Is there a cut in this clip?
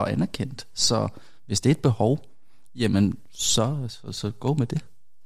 no; 0 cuts

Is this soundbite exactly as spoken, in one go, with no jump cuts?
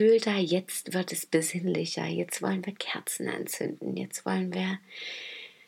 yes; 0 cuts

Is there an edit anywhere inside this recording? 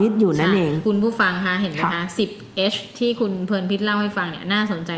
no; 0 cuts

